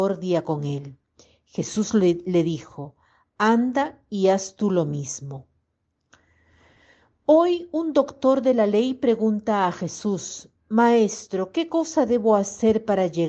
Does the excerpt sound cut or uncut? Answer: uncut